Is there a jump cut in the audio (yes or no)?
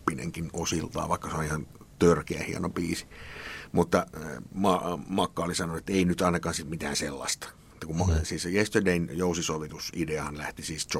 no